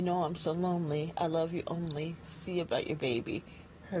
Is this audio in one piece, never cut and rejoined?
yes; 0 cuts

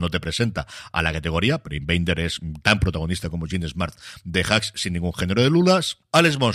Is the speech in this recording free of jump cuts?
yes; 0 cuts

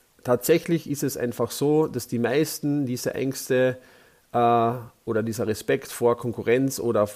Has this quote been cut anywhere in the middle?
no; 0 cuts

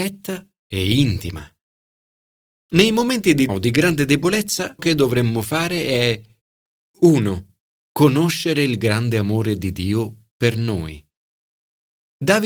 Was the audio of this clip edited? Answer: yes; 2 cuts; at 3.5 s, 4.8 s

